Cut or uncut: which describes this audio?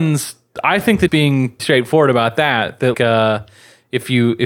cut